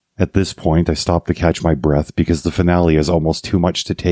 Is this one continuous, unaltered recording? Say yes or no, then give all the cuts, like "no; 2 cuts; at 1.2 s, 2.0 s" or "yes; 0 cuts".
yes; 0 cuts